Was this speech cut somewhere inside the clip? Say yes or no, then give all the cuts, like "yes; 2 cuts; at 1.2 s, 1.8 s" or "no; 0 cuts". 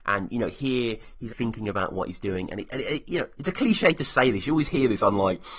yes; 1 cut; at 1.3 s